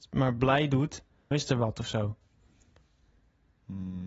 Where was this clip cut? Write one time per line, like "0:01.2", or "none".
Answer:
0:01.3